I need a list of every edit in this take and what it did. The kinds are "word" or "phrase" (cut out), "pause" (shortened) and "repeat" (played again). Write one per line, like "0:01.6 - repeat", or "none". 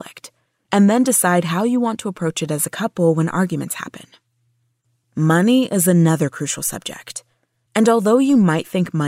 none